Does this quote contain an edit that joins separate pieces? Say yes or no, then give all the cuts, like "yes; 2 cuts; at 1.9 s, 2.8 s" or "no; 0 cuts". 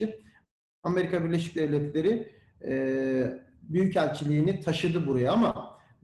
no; 0 cuts